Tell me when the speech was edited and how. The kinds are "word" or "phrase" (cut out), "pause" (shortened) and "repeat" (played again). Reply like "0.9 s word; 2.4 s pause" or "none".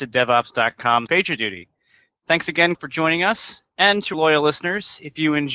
1.1 s word; 2.7 s word; 4.1 s word